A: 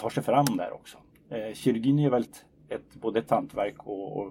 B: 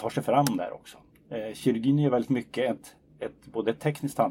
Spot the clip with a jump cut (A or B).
A